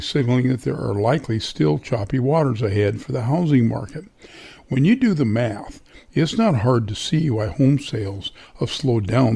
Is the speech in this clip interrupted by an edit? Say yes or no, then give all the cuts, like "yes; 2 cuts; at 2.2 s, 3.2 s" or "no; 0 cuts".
no; 0 cuts